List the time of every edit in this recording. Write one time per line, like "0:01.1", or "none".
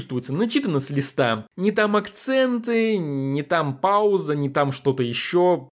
none